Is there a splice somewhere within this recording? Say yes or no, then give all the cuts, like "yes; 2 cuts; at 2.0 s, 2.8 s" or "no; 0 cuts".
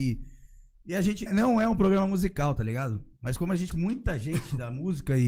yes; 2 cuts; at 1.3 s, 3.7 s